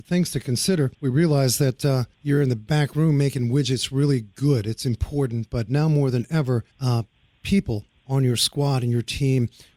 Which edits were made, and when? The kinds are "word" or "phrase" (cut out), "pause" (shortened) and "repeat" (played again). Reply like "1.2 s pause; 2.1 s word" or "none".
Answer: 0.9 s pause; 2.1 s pause; 6.7 s pause